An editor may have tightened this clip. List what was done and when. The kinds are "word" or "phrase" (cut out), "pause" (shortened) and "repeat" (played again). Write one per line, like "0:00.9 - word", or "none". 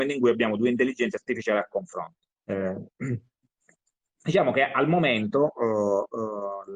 0:02.4 - pause